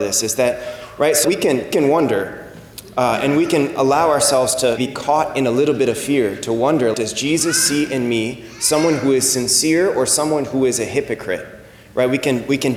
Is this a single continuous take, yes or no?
no